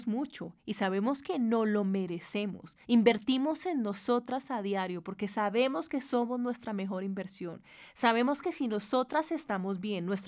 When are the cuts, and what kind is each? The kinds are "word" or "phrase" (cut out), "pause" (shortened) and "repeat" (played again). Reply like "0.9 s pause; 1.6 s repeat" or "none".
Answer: 2.8 s pause